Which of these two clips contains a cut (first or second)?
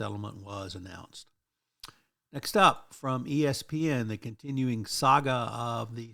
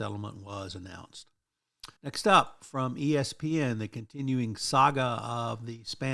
second